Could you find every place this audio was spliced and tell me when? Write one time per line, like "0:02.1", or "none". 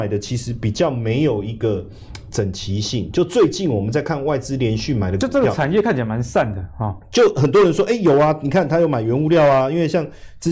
none